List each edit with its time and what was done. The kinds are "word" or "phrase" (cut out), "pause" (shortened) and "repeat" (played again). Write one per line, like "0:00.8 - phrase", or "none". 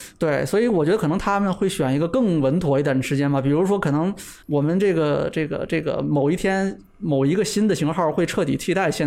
0:04.4 - pause